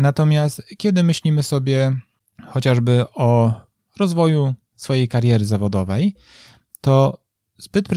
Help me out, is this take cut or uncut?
uncut